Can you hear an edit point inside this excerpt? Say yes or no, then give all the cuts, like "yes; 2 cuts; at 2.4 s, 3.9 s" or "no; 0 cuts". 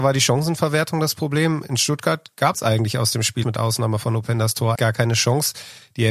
yes; 3 cuts; at 2.5 s, 3.4 s, 4.7 s